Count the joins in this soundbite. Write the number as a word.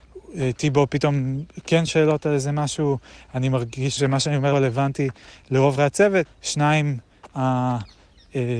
six